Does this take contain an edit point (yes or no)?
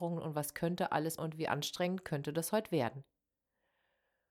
yes